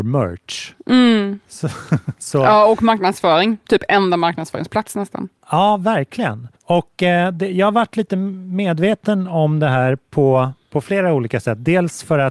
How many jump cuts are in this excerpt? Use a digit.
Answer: 1